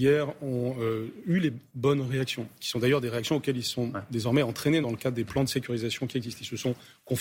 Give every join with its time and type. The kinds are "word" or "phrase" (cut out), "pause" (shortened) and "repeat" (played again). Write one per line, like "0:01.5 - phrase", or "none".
0:04.8 - word